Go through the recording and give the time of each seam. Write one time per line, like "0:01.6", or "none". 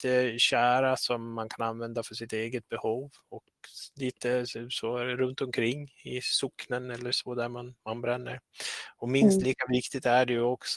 0:07.8